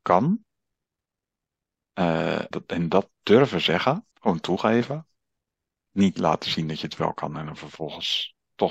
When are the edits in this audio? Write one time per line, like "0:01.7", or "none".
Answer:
0:02.5
0:04.1